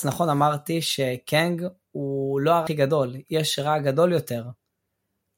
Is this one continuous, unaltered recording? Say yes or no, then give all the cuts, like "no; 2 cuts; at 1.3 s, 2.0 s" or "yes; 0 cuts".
no; 1 cut; at 2.7 s